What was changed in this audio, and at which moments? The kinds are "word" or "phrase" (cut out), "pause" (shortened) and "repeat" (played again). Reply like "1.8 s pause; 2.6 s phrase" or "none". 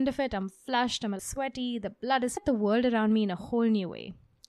1.2 s word; 2.4 s phrase